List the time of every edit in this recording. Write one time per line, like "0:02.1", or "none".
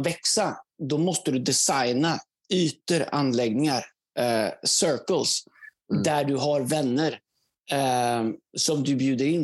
none

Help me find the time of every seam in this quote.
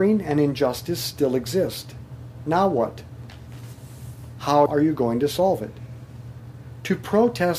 0:04.7

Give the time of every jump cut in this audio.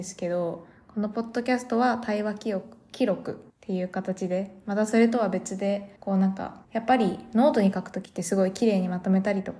0:03.5
0:06.0
0:06.6

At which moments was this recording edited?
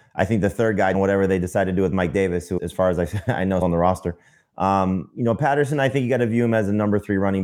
0:00.9
0:02.6
0:03.6

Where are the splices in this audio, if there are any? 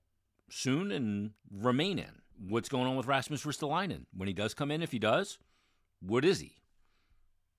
0:01.4
0:02.3

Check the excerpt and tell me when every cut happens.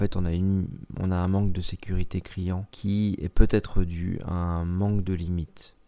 0:02.7

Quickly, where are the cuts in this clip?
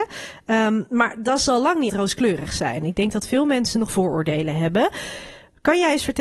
0:01.9
0:03.9

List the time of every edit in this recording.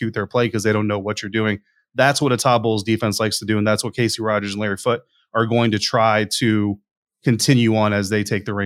none

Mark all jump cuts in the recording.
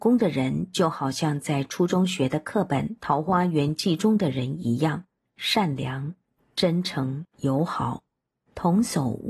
0:05.2
0:07.3

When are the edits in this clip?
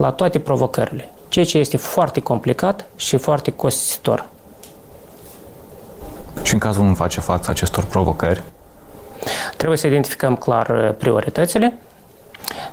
0:01.2
0:02.9
0:06.9

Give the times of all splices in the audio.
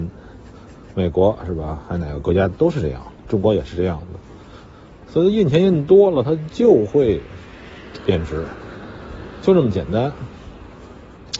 0:03.2

